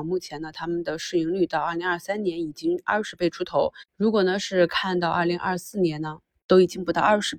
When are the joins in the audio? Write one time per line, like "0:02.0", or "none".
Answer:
none